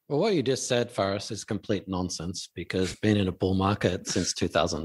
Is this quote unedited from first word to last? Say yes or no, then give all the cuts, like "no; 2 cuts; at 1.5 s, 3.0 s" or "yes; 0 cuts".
no; 1 cut; at 2.9 s